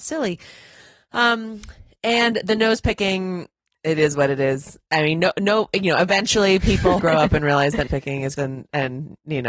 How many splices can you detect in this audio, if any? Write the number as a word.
three